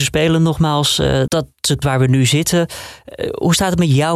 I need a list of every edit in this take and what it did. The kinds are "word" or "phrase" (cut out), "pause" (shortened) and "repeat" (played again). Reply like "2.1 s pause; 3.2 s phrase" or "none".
1.3 s word; 1.8 s word